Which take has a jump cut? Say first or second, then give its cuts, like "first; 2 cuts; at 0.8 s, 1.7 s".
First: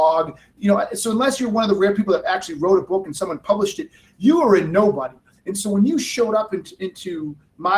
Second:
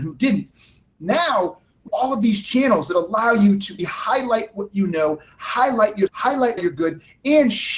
second; 4 cuts; at 1.9 s, 3.8 s, 6.1 s, 6.6 s